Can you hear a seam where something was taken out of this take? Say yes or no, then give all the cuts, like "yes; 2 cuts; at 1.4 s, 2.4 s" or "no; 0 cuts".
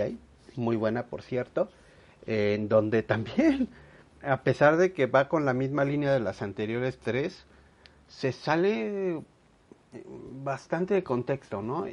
no; 0 cuts